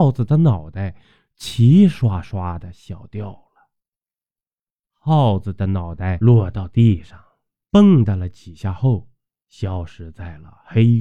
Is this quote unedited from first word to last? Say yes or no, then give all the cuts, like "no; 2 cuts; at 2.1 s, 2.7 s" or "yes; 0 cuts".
yes; 0 cuts